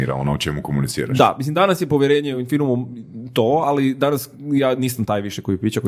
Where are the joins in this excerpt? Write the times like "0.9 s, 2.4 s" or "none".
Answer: none